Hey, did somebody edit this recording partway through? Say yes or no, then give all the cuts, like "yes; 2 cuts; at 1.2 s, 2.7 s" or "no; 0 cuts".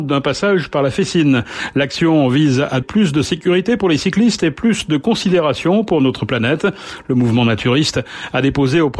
yes; 1 cut; at 2.8 s